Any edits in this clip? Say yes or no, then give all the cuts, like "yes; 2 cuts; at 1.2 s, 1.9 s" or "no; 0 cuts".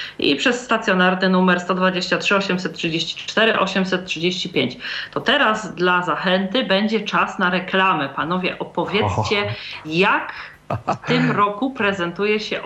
no; 0 cuts